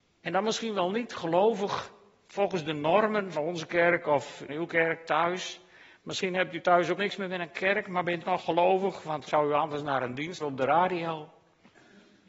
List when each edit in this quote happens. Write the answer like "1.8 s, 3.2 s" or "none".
3.3 s, 4.5 s, 7.0 s, 8.2 s, 9.3 s, 10.4 s